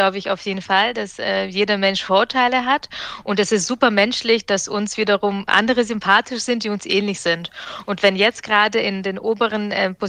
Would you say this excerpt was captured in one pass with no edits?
yes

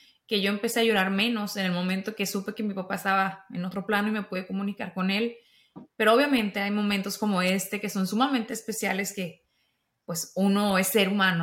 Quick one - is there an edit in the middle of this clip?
no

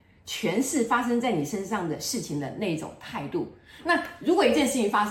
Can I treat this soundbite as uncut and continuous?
yes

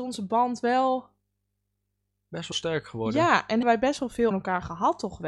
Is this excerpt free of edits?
no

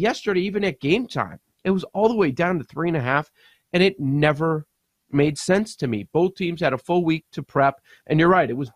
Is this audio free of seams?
yes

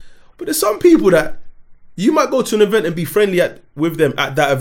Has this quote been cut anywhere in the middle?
no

